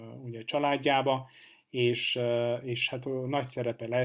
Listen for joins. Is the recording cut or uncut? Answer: uncut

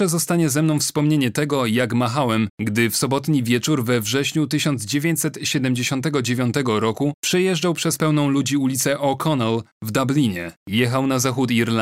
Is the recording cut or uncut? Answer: cut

